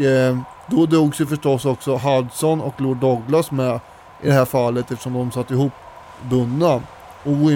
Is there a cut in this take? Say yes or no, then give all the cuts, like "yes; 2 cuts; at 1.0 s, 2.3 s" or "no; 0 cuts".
no; 0 cuts